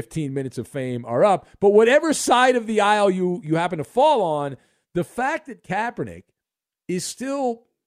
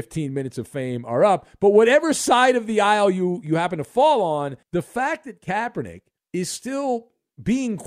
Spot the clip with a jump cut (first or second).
second